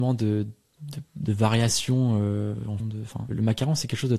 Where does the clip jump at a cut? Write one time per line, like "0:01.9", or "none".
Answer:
0:02.8
0:03.3

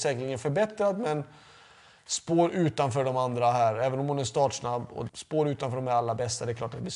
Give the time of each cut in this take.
0:05.1

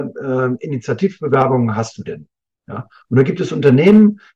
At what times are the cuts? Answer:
none

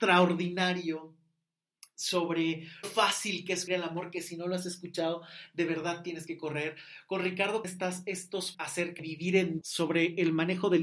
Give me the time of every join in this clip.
0:02.8
0:03.7
0:07.6
0:08.5
0:09.0
0:09.6

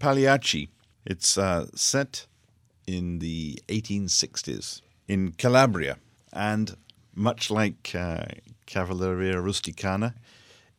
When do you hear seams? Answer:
none

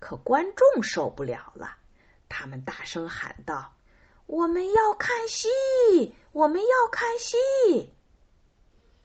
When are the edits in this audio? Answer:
none

